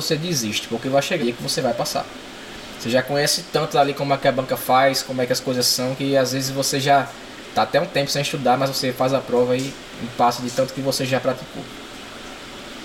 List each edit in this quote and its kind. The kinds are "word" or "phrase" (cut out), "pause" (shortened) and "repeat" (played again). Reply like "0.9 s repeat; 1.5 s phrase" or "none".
1.2 s word